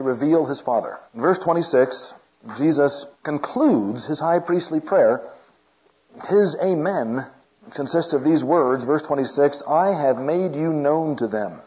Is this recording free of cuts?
no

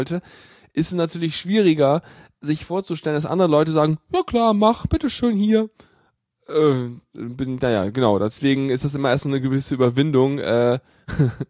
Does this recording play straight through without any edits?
yes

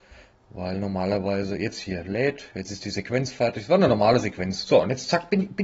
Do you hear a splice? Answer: no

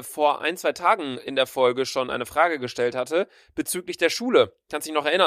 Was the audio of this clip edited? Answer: no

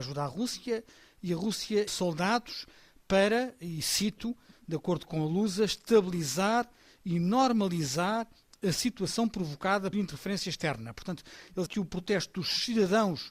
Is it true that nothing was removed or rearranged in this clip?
no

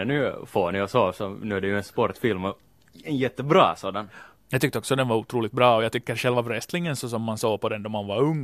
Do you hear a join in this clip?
no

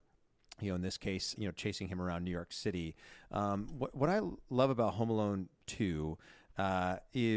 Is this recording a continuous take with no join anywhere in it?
no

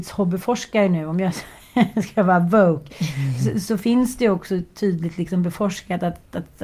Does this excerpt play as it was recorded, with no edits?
yes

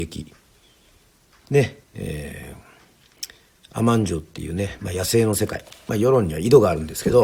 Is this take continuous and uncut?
no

